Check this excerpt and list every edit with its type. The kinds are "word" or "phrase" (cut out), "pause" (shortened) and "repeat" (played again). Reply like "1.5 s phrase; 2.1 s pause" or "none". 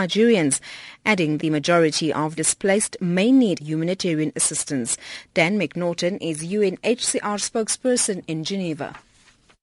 1.4 s word; 2.4 s word; 3.6 s phrase